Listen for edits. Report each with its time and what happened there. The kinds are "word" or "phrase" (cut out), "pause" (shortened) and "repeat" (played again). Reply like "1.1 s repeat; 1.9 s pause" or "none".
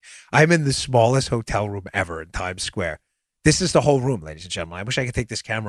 none